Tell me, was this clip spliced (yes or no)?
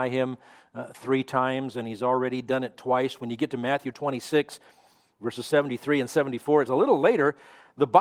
yes